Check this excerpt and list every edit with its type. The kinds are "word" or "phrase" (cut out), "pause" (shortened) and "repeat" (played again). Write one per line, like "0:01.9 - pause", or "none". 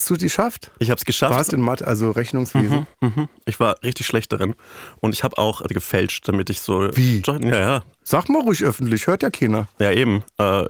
0:01.5 - phrase
0:02.9 - pause
0:05.7 - word